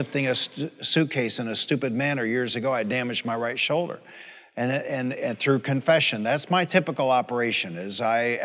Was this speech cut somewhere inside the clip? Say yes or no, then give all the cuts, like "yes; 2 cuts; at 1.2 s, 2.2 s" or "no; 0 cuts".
no; 0 cuts